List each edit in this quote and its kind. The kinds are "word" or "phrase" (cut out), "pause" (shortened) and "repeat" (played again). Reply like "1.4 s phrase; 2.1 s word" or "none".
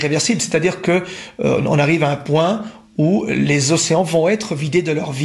none